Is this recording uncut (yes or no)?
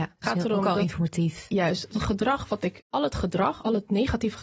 no